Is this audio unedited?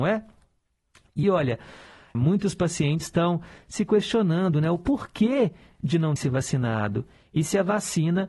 no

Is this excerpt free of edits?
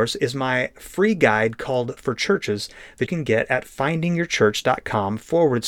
no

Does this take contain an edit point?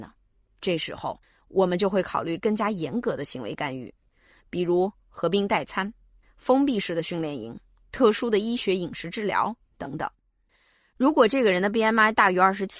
no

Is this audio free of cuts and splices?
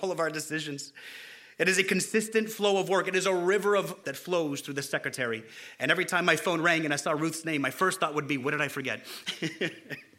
no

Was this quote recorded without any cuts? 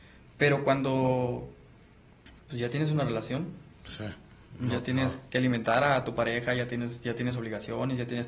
yes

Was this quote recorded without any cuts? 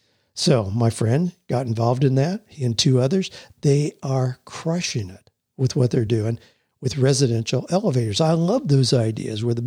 yes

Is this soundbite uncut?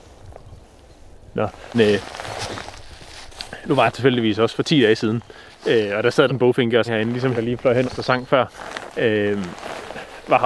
no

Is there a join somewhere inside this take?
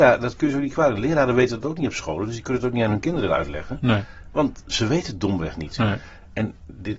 no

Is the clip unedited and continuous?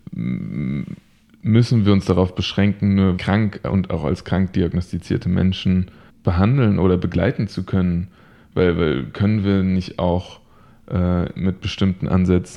no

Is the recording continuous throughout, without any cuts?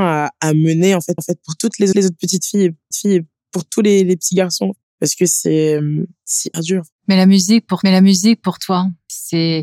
no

